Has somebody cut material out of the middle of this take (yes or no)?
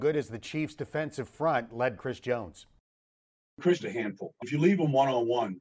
yes